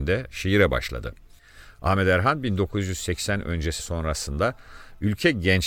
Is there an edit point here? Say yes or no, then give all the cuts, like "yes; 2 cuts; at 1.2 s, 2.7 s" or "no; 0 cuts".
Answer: yes; 1 cut; at 3.8 s